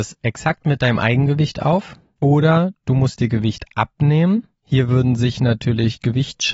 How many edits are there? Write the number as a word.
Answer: zero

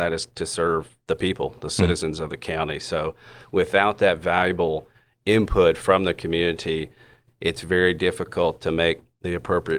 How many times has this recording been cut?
zero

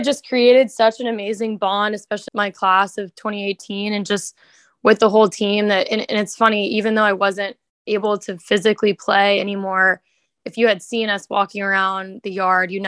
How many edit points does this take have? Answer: one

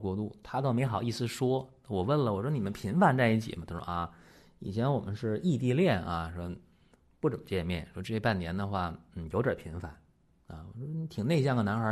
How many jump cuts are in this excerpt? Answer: zero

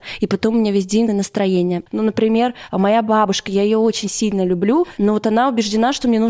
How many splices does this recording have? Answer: one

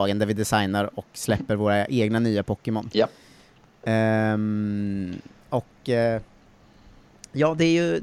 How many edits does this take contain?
zero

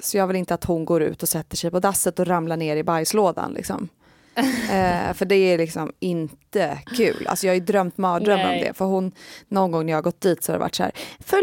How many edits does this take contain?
zero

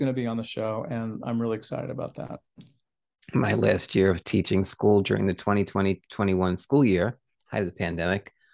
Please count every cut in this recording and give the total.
zero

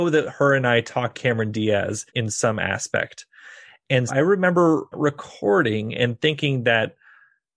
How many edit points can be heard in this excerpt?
four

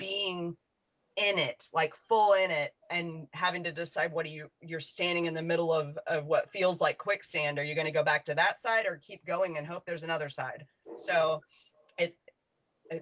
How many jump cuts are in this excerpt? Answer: two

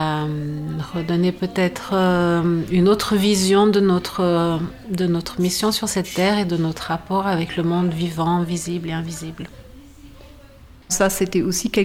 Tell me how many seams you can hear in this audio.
zero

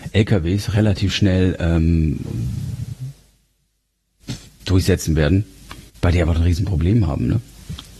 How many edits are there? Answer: one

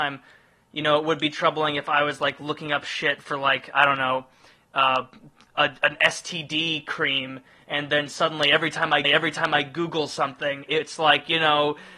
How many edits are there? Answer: one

